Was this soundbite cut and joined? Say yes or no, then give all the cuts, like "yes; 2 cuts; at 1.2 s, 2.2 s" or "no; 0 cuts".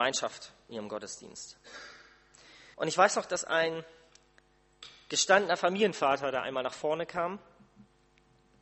yes; 1 cut; at 2.7 s